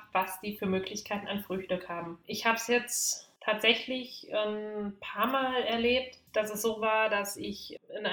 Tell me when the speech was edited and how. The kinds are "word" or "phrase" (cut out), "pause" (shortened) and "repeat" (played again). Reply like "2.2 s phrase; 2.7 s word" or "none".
none